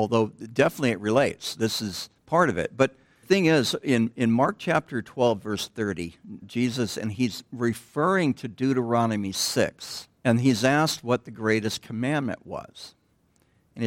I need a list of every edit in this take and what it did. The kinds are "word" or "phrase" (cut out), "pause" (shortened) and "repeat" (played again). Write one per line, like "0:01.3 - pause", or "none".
0:02.2 - pause
0:03.2 - phrase
0:06.4 - word
0:10.2 - pause